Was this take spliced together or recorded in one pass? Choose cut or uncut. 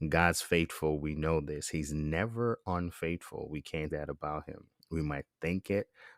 cut